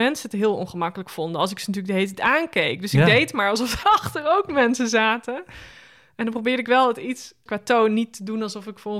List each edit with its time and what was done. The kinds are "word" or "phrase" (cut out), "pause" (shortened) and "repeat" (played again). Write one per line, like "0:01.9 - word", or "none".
0:03.8 - word
0:07.5 - word